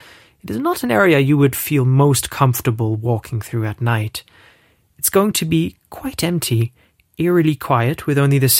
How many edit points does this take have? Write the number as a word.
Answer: zero